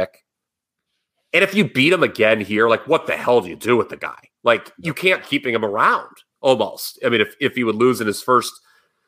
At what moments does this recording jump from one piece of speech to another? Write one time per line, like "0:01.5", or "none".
0:05.2